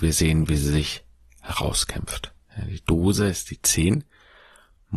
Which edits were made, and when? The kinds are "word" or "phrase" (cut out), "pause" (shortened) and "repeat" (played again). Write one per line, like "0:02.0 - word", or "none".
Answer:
none